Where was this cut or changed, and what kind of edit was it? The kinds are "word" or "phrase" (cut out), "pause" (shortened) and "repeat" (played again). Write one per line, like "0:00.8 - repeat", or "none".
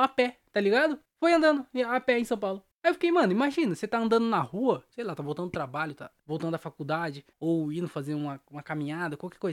0:01.0 - pause
0:02.7 - pause
0:06.2 - pause
0:07.3 - pause

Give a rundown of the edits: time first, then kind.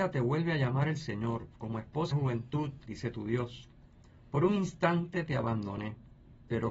0:02.1 - word
0:02.9 - word

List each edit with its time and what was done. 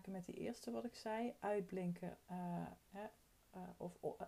0:02.3 - word
0:02.8 - word

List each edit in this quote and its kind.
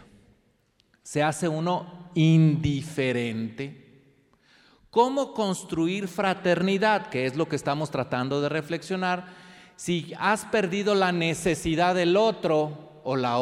none

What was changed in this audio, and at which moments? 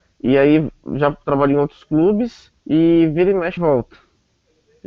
0:02.6 - pause
0:03.6 - word

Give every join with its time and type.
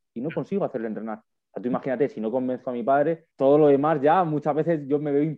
0:03.3 - pause

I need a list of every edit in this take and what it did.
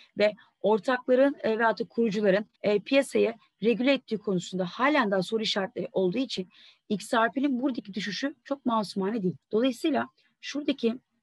0:02.5 - pause
0:09.4 - pause

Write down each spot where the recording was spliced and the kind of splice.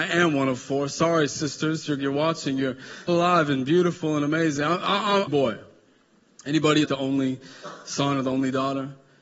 0:02.0 - word
0:03.1 - word
0:05.3 - phrase
0:06.8 - word

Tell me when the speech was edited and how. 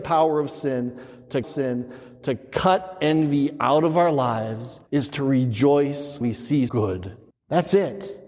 0:01.4 - repeat
0:04.9 - pause
0:06.2 - word
0:06.7 - word
0:07.3 - pause

